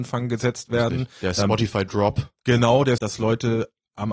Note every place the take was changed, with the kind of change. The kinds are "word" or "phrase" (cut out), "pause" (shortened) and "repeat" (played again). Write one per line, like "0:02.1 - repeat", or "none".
0:03.0 - word